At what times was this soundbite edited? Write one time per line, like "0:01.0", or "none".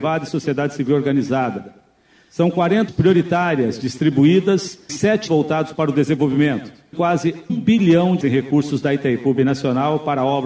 0:02.9
0:04.9
0:05.3
0:06.9
0:07.5
0:08.2